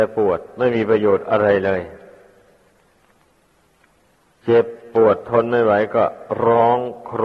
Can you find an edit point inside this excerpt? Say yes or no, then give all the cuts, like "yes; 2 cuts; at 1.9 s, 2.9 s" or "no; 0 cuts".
no; 0 cuts